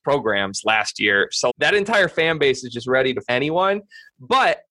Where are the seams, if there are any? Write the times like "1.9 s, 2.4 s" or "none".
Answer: 1.5 s, 3.3 s